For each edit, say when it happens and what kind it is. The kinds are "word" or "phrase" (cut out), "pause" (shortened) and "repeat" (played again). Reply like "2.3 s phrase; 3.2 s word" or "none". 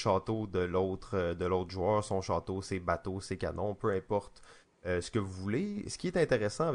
none